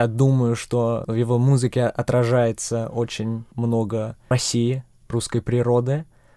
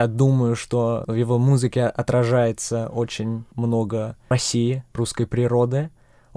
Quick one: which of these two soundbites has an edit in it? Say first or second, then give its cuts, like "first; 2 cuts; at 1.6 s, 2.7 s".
second; 1 cut; at 4.9 s